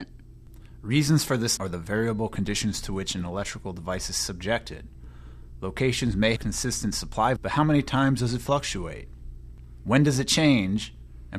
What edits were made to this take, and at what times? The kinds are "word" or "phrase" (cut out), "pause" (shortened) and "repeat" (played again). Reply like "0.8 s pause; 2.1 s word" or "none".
1.6 s phrase; 6.4 s word; 7.4 s word